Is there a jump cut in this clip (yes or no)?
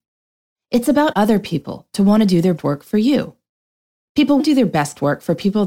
yes